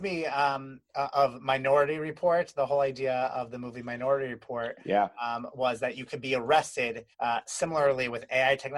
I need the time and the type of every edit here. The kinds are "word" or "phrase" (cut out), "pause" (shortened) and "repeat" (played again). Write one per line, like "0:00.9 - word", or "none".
0:07.1 - pause